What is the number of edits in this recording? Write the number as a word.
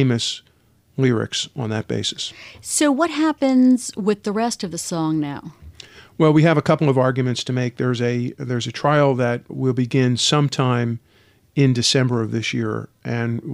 one